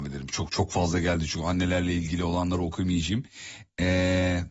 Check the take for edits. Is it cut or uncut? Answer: uncut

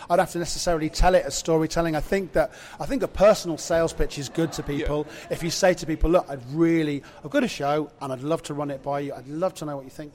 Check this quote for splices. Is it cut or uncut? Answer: uncut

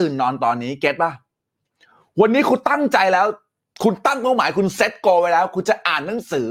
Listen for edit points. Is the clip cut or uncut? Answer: uncut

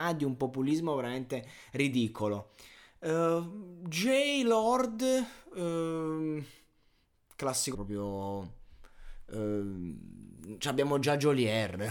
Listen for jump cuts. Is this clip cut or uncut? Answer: cut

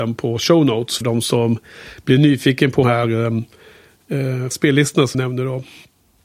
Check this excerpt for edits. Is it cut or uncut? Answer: cut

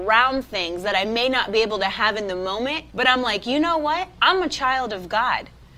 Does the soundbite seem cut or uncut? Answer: cut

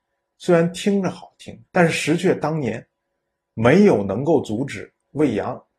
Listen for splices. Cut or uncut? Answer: cut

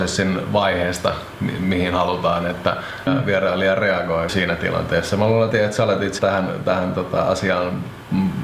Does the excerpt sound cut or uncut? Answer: cut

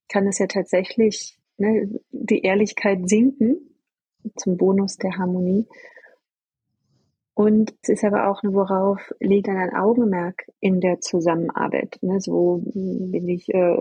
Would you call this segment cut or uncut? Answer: cut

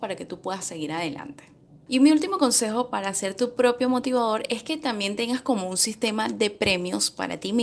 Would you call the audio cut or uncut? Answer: uncut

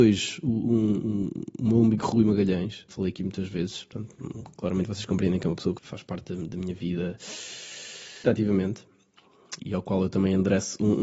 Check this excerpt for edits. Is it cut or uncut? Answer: cut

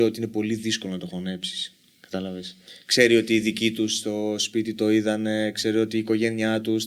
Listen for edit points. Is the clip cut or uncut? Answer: uncut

